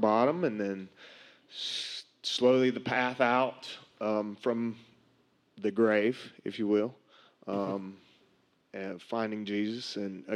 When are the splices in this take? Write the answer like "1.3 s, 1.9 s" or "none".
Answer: none